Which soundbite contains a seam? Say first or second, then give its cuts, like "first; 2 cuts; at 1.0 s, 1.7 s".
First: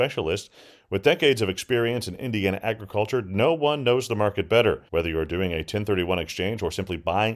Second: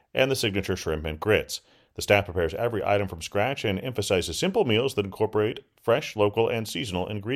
first; 1 cut; at 4.9 s